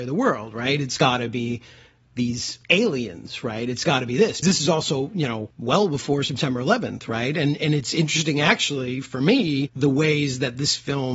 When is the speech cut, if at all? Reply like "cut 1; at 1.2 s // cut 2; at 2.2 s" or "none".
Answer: cut 1; at 2.6 s // cut 2; at 4.4 s